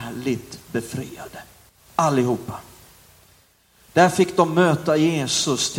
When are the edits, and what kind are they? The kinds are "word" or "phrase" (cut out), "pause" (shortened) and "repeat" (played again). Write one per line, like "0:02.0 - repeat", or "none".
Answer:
0:01.7 - pause